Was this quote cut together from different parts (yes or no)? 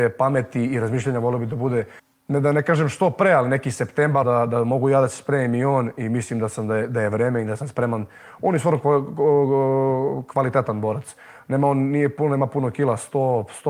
yes